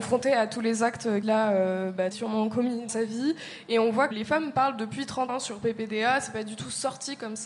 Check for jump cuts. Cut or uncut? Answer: cut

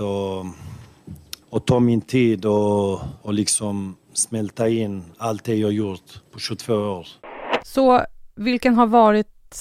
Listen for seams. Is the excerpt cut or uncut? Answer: cut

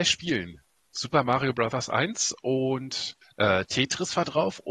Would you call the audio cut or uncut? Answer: cut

